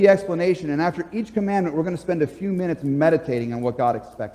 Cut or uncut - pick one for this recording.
uncut